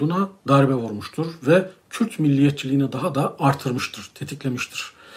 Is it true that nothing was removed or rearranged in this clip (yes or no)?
yes